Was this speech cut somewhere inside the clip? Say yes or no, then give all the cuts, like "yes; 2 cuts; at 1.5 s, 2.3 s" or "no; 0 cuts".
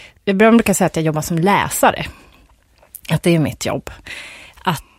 no; 0 cuts